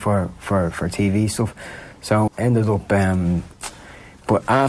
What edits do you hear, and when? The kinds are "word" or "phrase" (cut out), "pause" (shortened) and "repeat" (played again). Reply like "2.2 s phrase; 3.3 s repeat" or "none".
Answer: 2.3 s word